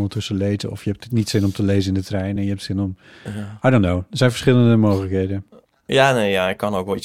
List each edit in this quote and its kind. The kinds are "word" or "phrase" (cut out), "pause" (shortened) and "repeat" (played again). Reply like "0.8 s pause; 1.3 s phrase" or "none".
none